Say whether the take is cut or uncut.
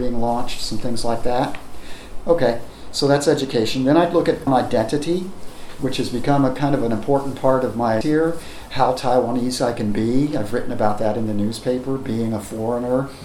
cut